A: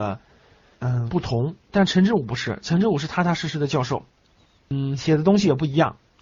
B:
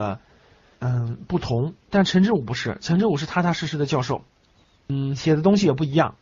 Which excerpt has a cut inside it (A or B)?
A